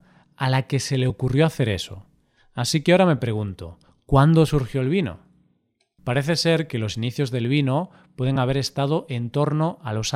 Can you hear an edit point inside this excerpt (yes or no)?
no